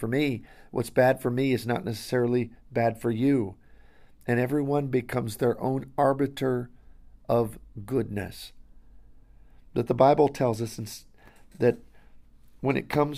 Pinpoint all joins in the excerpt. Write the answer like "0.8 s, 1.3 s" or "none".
none